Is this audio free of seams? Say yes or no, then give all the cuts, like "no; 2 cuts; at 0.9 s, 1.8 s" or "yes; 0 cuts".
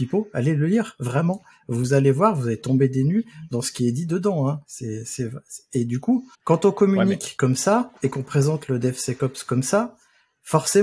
no; 2 cuts; at 6.3 s, 8.0 s